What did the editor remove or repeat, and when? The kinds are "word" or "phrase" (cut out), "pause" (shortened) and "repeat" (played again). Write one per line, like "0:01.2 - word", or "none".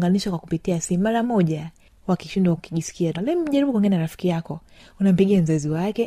0:01.2 - word
0:02.6 - phrase
0:03.1 - word